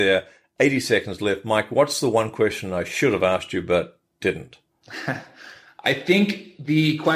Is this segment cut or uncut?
cut